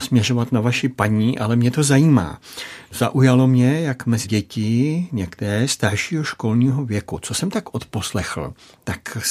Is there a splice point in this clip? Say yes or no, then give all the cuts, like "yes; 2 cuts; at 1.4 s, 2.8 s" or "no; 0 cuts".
yes; 1 cut; at 4.2 s